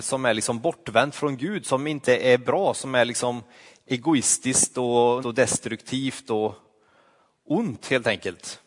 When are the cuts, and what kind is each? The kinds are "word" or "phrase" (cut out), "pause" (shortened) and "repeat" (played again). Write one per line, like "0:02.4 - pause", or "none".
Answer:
0:05.2 - word